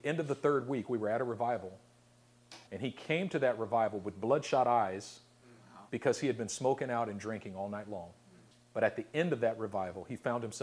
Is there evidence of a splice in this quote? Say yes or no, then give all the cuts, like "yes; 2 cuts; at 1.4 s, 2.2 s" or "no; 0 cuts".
yes; 3 cuts; at 2.7 s, 5.9 s, 8.5 s